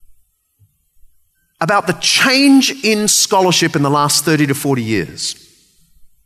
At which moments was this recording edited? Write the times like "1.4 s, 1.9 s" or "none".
none